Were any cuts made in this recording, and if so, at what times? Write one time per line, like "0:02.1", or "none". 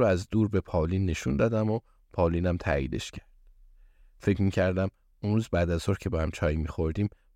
none